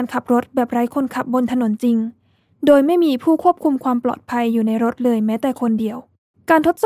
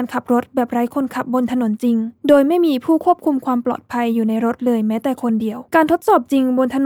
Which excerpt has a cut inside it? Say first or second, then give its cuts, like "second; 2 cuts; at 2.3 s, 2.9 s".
second; 2 cuts; at 2.2 s, 5.7 s